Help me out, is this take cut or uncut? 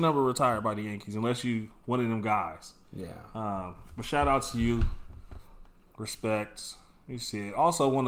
uncut